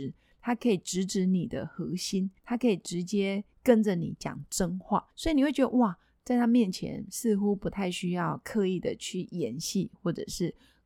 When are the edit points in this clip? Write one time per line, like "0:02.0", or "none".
0:02.4
0:05.1